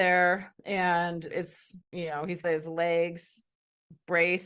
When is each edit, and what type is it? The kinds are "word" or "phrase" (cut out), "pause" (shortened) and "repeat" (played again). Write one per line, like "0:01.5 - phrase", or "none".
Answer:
0:01.3 - word
0:01.8 - pause
0:02.4 - word